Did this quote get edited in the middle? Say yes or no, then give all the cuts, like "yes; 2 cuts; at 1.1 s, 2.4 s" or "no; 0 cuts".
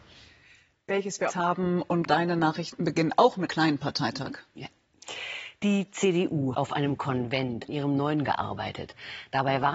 yes; 6 cuts; at 1.3 s, 2.1 s, 3.5 s, 6.5 s, 7.7 s, 8.3 s